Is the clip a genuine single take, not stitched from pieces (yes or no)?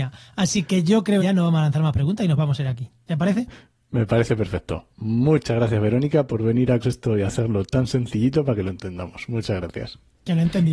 no